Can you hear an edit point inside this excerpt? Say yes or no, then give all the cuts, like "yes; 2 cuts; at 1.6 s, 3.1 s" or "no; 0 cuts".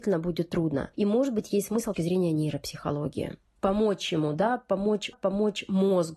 yes; 2 cuts; at 1.9 s, 5.1 s